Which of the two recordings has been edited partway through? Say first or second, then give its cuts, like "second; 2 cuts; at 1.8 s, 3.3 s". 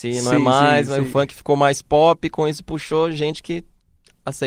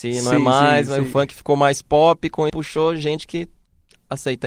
second; 1 cut; at 2.5 s